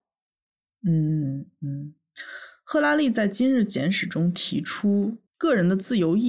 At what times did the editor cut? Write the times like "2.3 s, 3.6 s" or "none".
5.3 s